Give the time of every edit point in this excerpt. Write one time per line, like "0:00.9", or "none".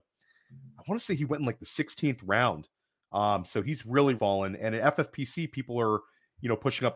0:04.2